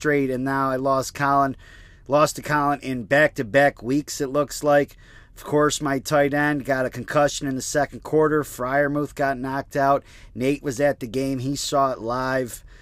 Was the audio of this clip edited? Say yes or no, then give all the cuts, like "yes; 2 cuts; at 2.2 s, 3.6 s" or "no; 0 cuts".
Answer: no; 0 cuts